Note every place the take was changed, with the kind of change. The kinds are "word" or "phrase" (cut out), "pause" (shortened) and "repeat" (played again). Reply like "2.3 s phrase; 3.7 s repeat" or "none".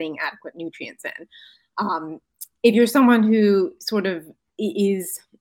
none